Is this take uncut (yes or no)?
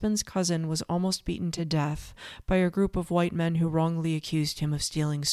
yes